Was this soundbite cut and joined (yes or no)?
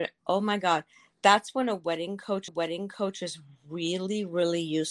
yes